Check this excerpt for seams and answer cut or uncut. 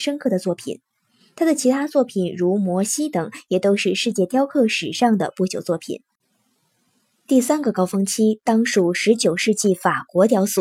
uncut